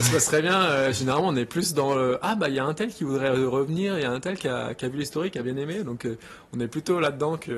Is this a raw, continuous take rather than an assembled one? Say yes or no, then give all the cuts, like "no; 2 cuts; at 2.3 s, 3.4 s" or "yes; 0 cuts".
yes; 0 cuts